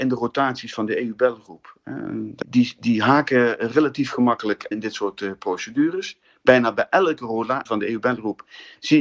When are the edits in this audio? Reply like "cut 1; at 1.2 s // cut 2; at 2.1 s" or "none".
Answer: cut 1; at 2.4 s // cut 2; at 4.7 s // cut 3; at 7.7 s